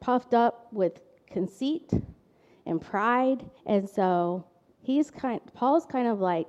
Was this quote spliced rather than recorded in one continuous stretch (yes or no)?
yes